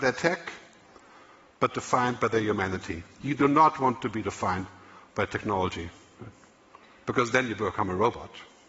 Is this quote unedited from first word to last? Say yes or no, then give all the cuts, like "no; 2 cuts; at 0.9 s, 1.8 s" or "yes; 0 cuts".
yes; 0 cuts